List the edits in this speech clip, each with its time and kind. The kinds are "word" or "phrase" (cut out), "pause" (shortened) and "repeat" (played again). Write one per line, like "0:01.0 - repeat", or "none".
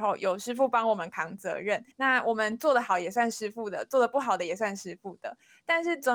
0:01.9 - pause